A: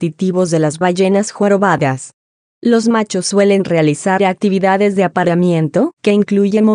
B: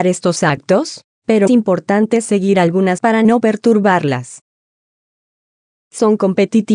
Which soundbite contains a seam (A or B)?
B